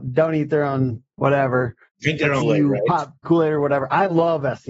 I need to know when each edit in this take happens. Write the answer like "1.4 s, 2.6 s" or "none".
1.9 s, 2.4 s, 3.2 s